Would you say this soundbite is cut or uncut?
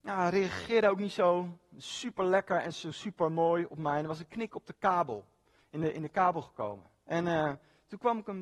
uncut